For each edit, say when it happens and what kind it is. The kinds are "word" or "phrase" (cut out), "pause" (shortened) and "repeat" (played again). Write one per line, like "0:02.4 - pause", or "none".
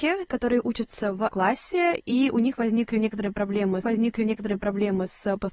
0:01.3 - word
0:03.8 - repeat